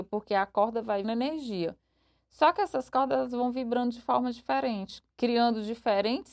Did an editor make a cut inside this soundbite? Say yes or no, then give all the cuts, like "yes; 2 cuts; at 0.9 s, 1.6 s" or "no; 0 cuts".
yes; 1 cut; at 1.0 s